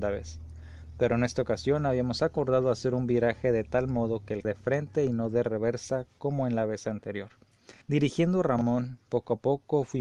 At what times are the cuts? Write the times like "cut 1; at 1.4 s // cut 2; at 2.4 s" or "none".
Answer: cut 1; at 4.4 s // cut 2; at 7.8 s